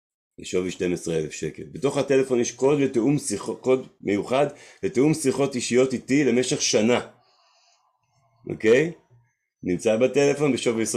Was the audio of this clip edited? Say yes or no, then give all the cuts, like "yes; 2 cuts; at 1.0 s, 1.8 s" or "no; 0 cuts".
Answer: no; 0 cuts